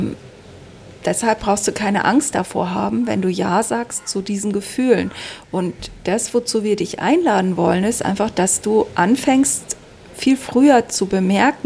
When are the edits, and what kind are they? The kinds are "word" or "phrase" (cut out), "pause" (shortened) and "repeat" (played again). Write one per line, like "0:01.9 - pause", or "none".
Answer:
none